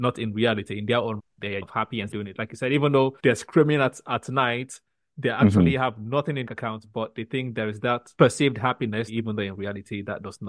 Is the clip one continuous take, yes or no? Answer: no